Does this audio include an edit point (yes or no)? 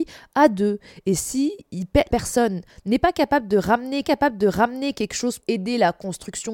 yes